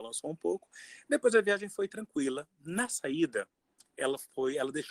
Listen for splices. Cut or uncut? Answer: uncut